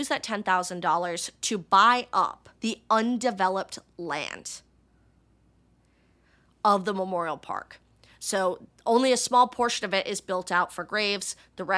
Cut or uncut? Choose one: cut